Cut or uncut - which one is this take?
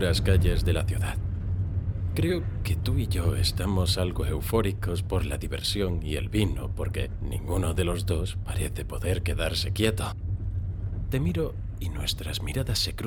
uncut